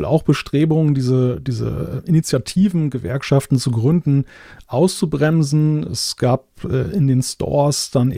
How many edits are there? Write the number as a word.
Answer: zero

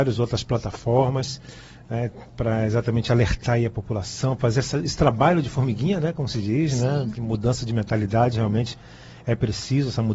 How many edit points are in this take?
zero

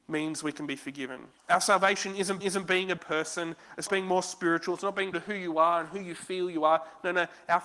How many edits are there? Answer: five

